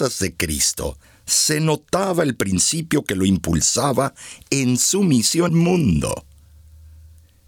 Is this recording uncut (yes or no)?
no